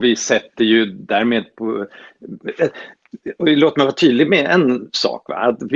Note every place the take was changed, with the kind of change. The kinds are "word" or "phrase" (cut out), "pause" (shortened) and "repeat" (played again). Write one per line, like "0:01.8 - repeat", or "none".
none

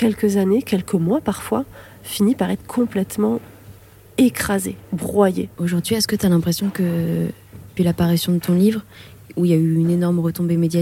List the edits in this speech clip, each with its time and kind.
0:05.5 - pause
0:07.8 - word

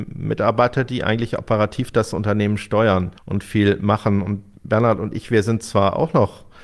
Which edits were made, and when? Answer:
0:03.2 - pause

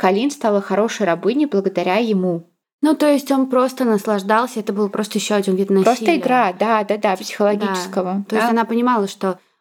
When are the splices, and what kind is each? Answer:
0:02.6 - pause

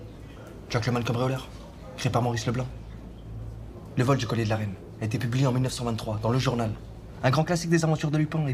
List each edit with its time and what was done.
none

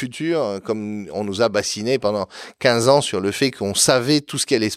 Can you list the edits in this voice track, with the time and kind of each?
none

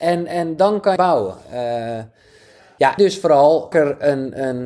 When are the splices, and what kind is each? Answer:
0:01.0 - word
0:03.0 - word
0:03.7 - word

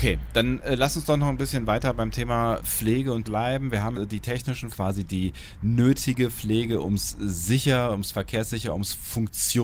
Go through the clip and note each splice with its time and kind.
0:02.6 - word
0:03.2 - word
0:03.9 - word
0:04.7 - phrase

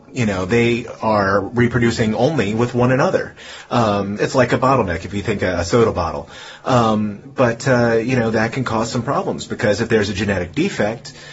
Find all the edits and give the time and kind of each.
0:04.2 - word
0:05.4 - word

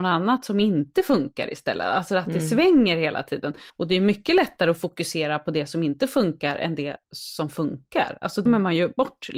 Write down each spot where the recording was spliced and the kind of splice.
0:03.7 - pause
0:07.0 - pause
0:08.5 - word

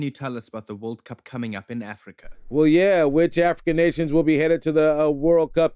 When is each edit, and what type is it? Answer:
0:01.2 - word

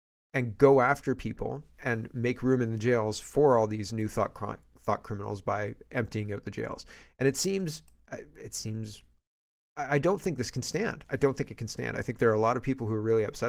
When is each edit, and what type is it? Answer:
none

